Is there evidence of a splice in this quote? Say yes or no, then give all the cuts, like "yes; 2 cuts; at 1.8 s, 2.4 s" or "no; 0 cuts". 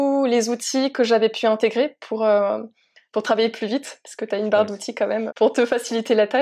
yes; 1 cut; at 5.3 s